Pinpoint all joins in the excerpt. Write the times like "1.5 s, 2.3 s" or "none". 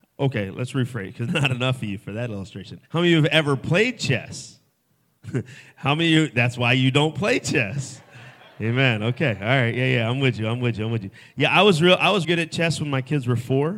1.3 s, 2.8 s, 12.2 s